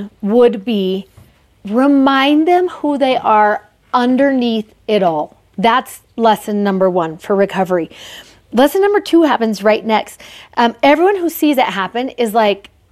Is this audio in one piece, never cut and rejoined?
yes; 0 cuts

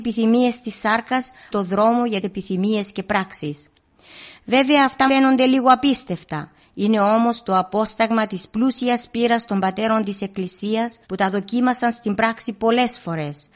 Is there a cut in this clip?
yes; 4 cuts; at 1.5 s, 2.2 s, 5.1 s, 11.0 s

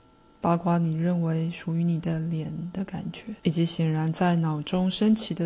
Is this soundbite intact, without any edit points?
no; 1 cut; at 3.4 s

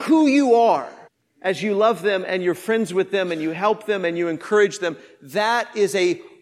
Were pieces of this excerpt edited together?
yes; 1 cut; at 1.1 s

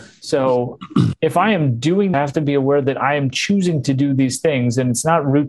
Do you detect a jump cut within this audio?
yes; 1 cut; at 2.1 s

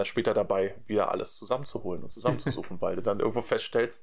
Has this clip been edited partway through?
no; 0 cuts

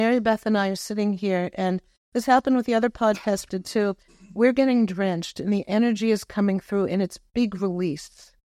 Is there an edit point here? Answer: yes; 1 cut; at 3.5 s

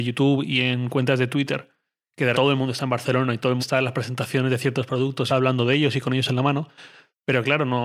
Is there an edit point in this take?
yes; 3 cuts; at 2.3 s, 3.6 s, 5.3 s

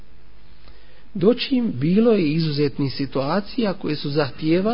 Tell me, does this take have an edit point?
no; 0 cuts

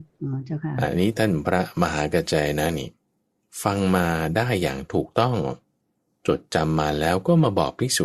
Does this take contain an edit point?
no; 0 cuts

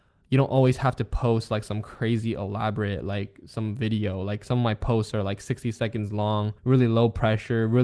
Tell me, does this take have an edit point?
yes; 1 cut; at 6.6 s

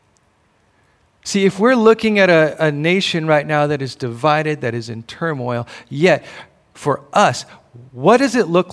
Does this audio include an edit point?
no; 0 cuts

